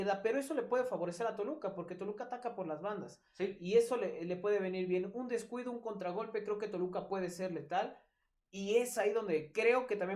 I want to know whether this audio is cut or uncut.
uncut